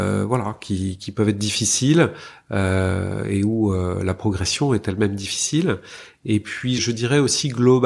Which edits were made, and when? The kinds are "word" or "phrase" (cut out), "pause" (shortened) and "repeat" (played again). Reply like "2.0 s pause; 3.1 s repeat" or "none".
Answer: 1.0 s word; 6.8 s word

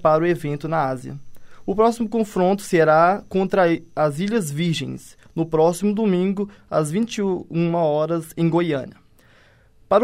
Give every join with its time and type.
none

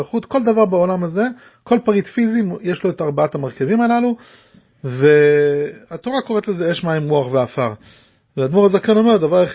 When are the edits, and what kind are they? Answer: none

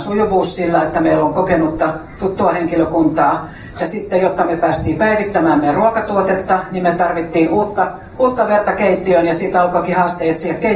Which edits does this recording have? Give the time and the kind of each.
none

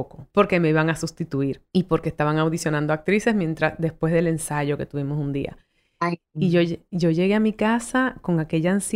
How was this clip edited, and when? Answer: none

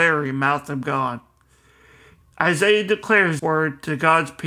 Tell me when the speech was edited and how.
3.4 s word

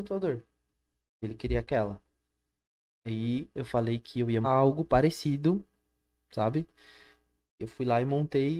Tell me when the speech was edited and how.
4.4 s word

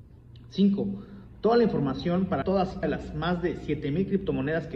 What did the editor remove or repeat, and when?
2.4 s word; 2.8 s word

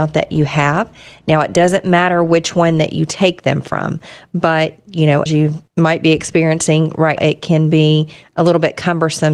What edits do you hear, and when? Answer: 5.3 s word; 5.7 s pause; 7.2 s word

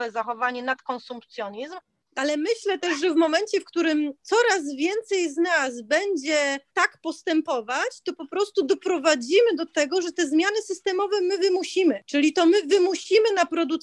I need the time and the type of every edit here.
none

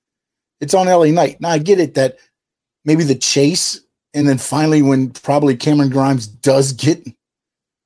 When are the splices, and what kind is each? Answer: none

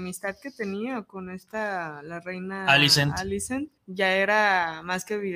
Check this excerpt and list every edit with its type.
3.8 s pause

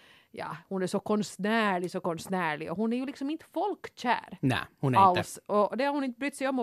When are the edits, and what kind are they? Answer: none

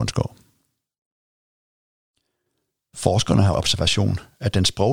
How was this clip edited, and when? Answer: 3.5 s phrase

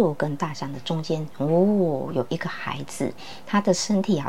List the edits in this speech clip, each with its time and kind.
none

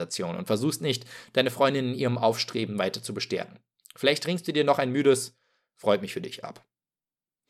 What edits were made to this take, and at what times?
none

